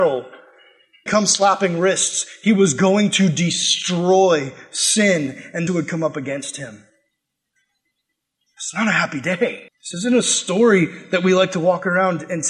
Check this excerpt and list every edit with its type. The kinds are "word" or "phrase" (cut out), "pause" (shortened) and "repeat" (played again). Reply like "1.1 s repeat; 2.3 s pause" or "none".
1.1 s phrase; 5.7 s word; 9.7 s pause